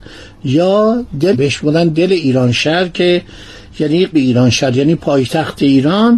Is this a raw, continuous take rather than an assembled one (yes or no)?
no